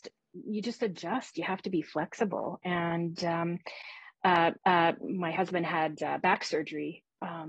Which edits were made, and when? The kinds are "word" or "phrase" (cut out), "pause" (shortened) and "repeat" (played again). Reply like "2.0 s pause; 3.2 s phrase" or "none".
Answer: 4.6 s repeat